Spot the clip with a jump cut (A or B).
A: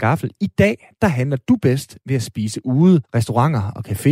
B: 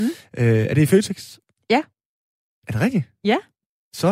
A